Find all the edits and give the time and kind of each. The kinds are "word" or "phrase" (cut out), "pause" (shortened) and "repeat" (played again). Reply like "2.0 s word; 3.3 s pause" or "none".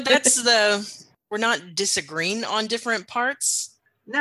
none

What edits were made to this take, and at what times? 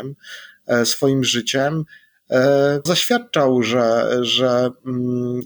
2.9 s word

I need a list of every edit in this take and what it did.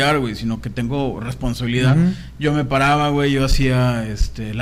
none

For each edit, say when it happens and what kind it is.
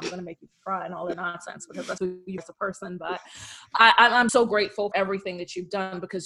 1.1 s word; 2.0 s word; 2.4 s word; 4.3 s word; 4.9 s word

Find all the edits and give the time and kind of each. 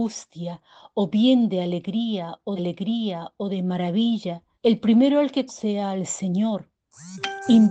2.6 s repeat; 4.5 s pause; 5.5 s word

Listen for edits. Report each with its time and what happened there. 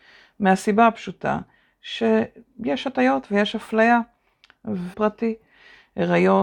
4.9 s phrase

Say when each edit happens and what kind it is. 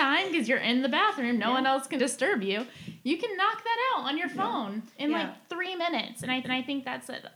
2.0 s word; 6.4 s repeat

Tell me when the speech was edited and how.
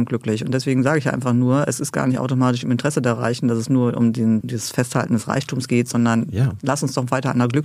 4.4 s word

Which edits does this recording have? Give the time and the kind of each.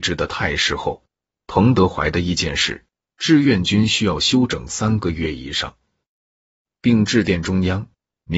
none

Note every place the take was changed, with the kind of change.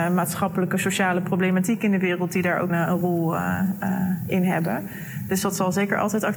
2.7 s word

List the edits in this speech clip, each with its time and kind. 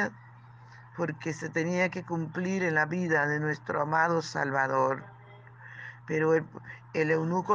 none

